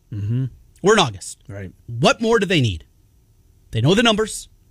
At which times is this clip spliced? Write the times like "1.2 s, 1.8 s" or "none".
1.8 s